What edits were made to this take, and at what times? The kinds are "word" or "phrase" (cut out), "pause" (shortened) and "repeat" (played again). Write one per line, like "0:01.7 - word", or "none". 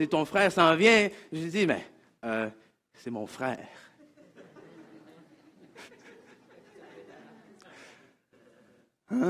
none